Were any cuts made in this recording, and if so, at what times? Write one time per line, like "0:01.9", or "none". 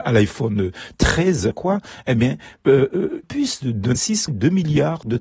0:01.5
0:03.2
0:04.0
0:04.3